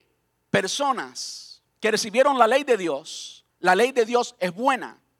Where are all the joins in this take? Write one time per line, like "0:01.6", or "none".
0:01.7
0:03.5